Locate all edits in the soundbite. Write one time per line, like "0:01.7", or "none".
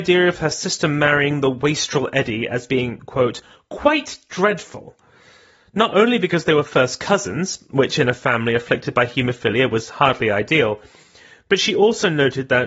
none